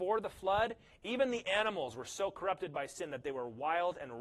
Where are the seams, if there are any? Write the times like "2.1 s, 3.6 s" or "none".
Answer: none